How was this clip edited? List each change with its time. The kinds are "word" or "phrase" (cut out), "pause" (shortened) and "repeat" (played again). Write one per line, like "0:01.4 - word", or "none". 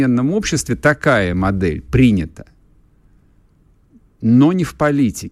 none